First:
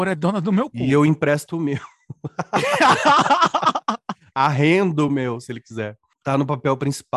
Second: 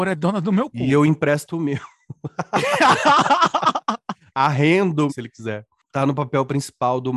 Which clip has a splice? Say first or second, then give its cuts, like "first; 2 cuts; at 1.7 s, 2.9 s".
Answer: second; 1 cut; at 5.1 s